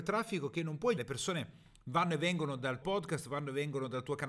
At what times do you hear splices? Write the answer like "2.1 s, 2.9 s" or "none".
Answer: 1.0 s, 2.8 s